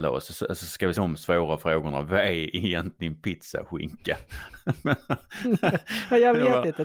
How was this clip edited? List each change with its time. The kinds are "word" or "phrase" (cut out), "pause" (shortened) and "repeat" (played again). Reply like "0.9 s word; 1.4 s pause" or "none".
0.9 s word